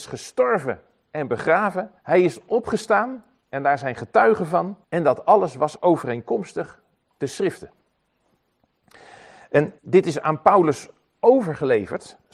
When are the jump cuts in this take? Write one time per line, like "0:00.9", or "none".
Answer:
0:02.0
0:04.8
0:09.8